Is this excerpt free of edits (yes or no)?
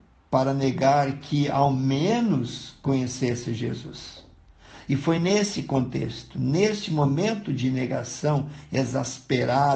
yes